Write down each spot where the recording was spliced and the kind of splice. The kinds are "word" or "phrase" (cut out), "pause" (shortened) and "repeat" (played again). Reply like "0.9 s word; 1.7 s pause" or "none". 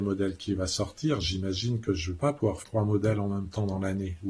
2.6 s word

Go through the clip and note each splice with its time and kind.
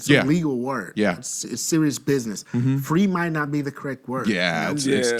none

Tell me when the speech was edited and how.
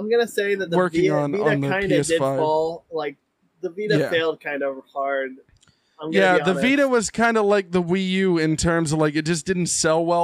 none

